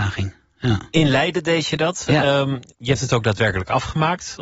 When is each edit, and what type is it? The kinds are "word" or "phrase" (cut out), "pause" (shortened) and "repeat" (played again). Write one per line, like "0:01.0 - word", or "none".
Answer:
0:02.7 - pause